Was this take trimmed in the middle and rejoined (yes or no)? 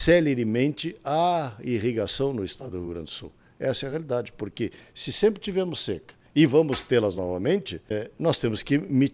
no